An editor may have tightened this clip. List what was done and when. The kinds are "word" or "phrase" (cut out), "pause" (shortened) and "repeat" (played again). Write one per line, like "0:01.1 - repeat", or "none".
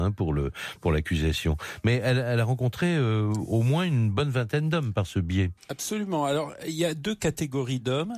0:05.6 - pause